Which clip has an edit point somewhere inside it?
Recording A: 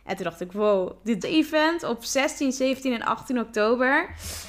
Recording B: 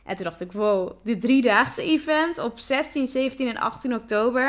A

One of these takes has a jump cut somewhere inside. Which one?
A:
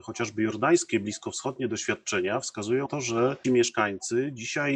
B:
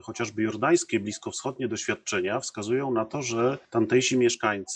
A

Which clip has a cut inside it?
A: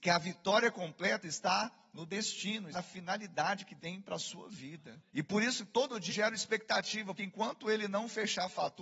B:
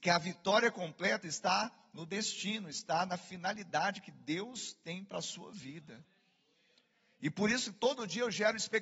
A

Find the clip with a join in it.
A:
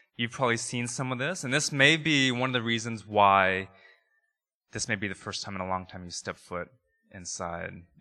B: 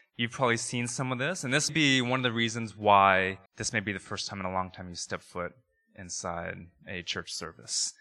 B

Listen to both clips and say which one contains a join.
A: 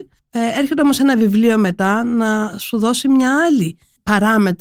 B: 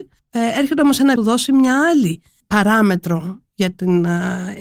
B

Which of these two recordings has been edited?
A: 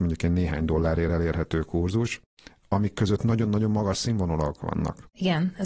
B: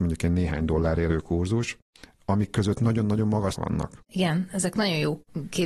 B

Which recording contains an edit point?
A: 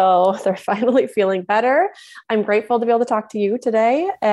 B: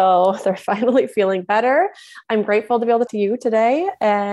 B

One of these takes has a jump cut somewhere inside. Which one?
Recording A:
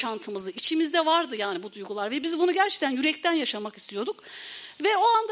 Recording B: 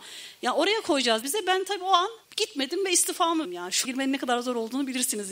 B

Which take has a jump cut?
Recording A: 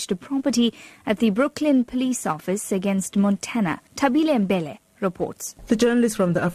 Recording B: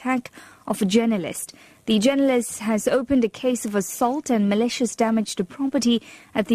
A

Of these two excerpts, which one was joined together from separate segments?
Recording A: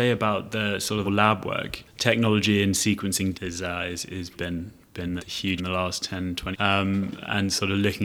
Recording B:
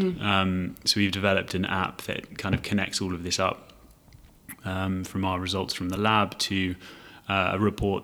A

